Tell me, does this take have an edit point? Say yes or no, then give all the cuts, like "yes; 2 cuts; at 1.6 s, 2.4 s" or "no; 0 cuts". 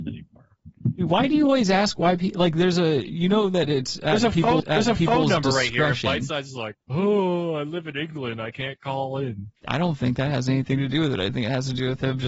yes; 3 cuts; at 4.6 s, 6.8 s, 9.6 s